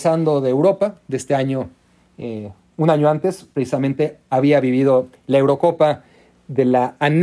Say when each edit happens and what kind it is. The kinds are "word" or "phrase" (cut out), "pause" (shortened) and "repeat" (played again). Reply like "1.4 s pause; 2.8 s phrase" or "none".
none